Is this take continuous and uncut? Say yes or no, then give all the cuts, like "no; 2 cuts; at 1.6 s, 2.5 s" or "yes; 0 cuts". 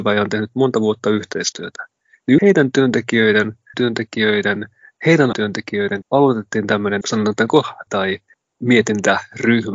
no; 6 cuts; at 2.4 s, 3.7 s, 5.3 s, 6.0 s, 7.0 s, 7.9 s